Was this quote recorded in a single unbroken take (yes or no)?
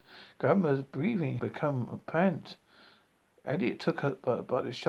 no